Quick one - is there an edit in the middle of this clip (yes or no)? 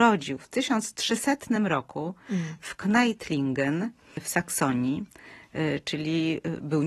no